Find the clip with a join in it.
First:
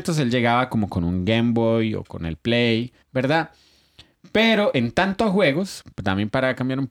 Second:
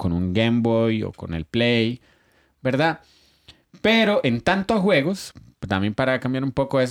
first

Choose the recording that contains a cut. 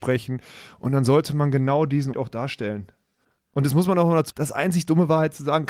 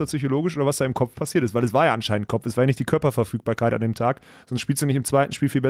first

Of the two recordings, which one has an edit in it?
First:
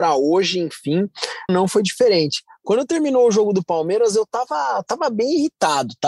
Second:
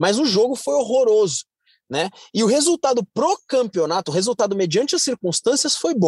first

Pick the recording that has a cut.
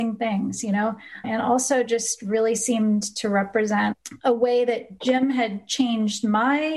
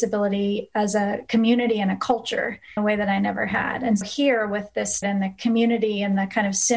second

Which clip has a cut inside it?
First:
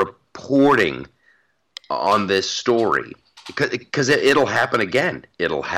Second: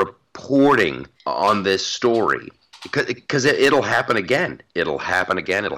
second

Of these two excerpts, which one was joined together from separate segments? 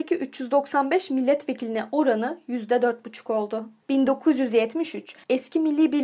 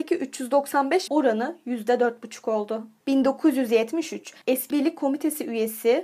second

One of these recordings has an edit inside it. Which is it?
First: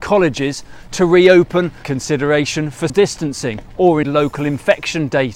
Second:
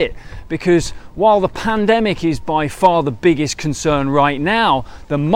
first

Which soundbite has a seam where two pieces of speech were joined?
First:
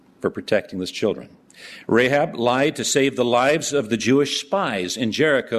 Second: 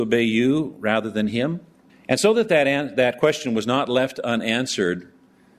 second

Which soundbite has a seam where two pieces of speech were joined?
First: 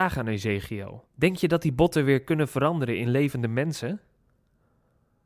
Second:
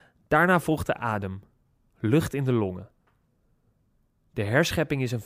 first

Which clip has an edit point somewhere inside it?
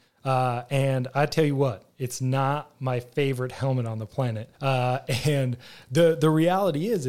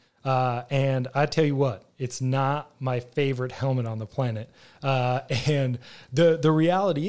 first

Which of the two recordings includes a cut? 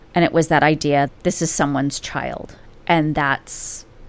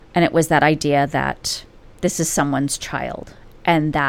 first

